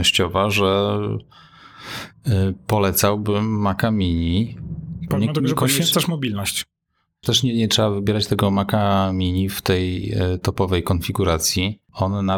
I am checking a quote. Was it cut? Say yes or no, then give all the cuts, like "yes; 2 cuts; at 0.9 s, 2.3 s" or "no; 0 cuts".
no; 0 cuts